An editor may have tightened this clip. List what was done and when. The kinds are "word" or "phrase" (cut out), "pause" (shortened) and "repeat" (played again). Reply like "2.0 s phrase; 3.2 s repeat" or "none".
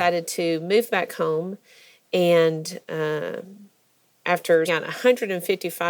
4.7 s word